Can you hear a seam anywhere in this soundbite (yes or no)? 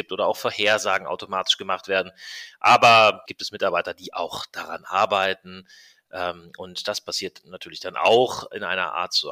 yes